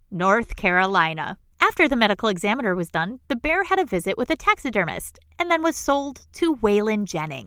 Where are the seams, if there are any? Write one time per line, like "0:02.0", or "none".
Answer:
0:01.5